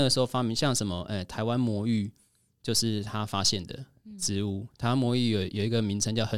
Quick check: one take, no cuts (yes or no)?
yes